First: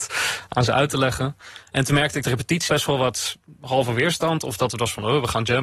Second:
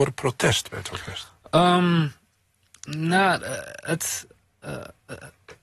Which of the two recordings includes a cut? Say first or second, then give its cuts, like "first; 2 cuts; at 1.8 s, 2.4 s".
first; 2 cuts; at 2.2 s, 2.7 s